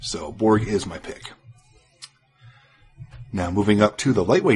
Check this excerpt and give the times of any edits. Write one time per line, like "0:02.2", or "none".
none